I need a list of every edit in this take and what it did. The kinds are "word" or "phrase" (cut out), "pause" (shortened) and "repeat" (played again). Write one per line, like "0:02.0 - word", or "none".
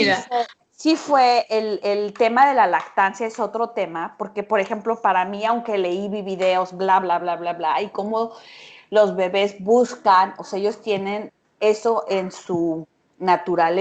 none